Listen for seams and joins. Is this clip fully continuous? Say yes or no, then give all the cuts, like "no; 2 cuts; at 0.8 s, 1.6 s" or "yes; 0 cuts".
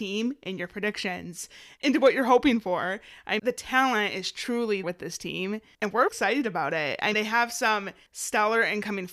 no; 4 cuts; at 3.4 s, 4.8 s, 6.1 s, 7.1 s